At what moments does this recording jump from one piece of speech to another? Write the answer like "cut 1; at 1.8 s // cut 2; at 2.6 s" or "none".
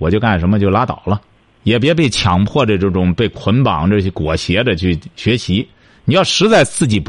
cut 1; at 1.4 s